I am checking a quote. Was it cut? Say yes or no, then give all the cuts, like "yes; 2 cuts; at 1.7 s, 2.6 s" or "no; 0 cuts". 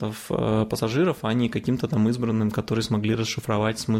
no; 0 cuts